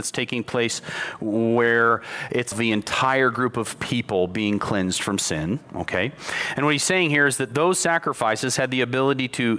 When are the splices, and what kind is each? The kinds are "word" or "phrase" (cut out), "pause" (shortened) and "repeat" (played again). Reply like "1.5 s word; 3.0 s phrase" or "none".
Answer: 2.5 s phrase